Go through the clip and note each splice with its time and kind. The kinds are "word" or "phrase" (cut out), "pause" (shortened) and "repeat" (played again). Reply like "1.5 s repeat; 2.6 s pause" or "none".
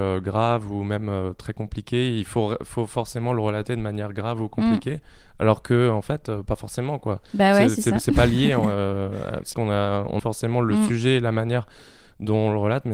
9.5 s word; 10.2 s word